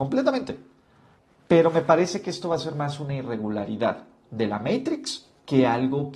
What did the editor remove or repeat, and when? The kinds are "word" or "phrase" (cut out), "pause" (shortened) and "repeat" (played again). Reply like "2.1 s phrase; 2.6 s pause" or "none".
none